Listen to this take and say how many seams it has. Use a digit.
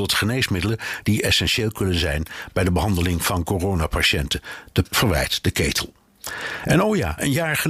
1